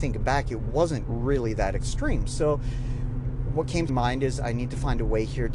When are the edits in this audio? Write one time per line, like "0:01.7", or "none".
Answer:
0:03.9